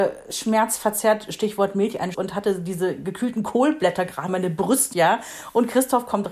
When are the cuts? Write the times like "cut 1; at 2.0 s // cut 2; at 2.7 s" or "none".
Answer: cut 1; at 2.1 s // cut 2; at 4.3 s // cut 3; at 4.9 s